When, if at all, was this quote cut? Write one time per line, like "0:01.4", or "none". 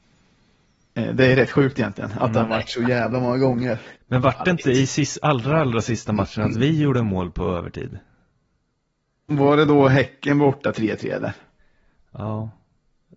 0:04.0